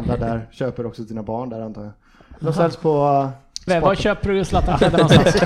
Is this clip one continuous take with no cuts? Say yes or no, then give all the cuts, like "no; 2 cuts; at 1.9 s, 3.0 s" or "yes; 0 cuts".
no; 1 cut; at 3.7 s